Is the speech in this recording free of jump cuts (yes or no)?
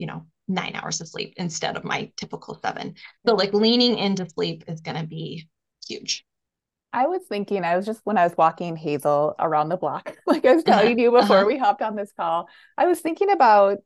yes